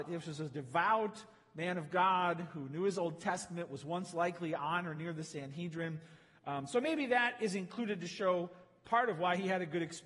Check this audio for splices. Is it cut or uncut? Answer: uncut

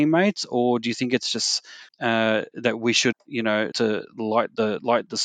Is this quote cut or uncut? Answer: cut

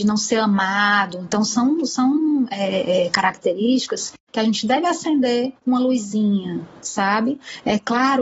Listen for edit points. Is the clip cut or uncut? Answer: cut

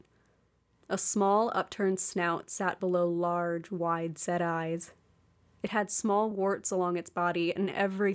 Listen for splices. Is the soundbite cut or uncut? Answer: uncut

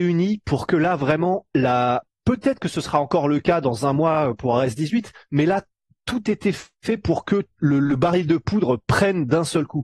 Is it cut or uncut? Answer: uncut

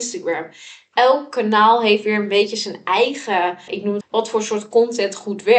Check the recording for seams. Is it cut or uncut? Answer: cut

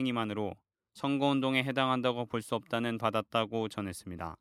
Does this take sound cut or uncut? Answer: cut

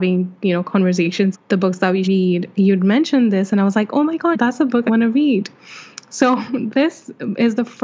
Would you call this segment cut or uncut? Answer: cut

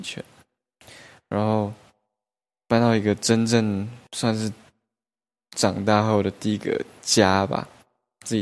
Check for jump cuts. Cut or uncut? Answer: cut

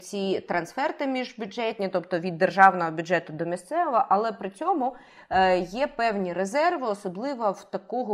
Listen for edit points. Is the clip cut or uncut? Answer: uncut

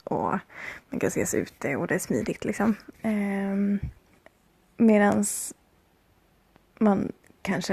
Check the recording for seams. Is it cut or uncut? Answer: cut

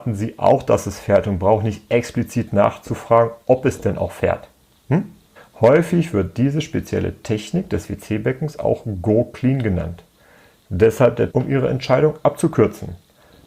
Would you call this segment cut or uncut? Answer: cut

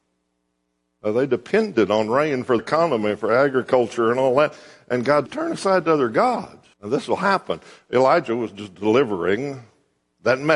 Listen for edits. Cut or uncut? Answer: cut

